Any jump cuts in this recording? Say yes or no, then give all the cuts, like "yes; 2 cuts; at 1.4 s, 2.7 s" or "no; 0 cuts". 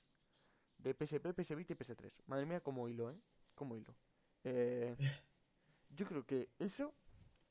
no; 0 cuts